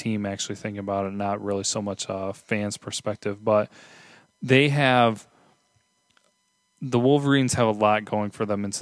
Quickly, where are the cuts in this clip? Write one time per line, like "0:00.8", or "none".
none

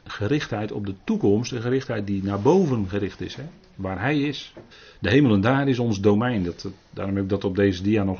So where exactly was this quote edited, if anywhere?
0:04.7

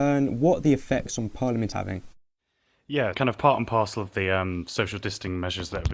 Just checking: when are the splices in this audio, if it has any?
0:01.7
0:03.1

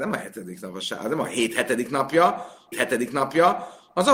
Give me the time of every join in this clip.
0:02.7

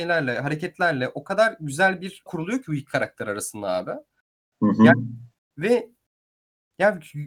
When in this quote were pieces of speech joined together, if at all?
0:02.3

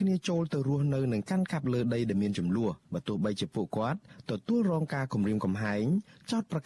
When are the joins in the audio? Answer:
0:02.8

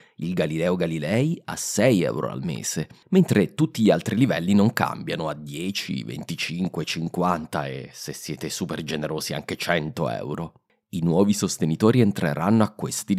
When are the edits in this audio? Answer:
none

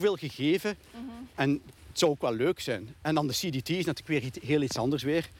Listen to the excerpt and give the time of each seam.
0:01.8

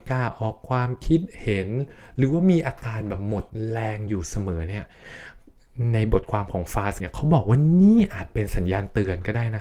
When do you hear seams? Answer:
0:07.0

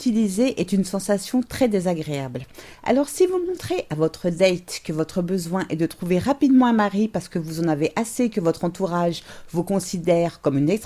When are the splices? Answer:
none

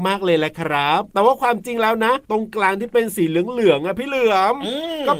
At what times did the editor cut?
0:01.1
0:02.2

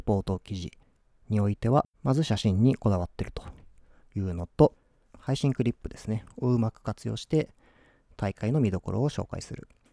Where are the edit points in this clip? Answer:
0:01.9
0:05.0

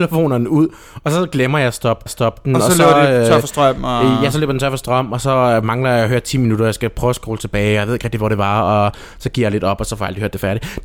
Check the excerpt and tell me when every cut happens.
0:02.1

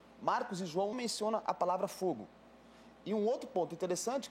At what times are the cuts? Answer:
0:00.9

